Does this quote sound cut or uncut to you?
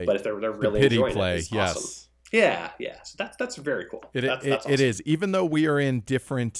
uncut